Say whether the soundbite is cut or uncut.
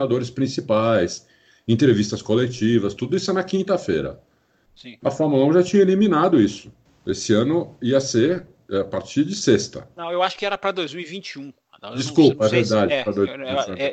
cut